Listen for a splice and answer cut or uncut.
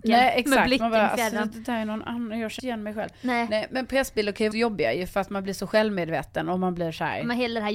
cut